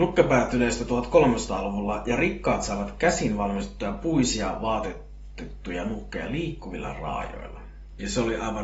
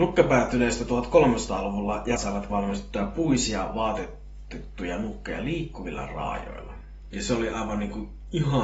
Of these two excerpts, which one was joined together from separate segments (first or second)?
second